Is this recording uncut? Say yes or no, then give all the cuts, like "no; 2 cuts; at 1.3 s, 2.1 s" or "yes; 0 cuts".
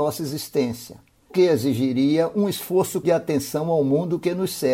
no; 2 cuts; at 1.3 s, 3.0 s